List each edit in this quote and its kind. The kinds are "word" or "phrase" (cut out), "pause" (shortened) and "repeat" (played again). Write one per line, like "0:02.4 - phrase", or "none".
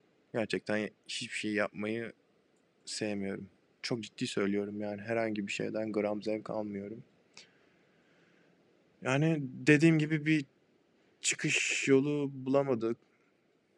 none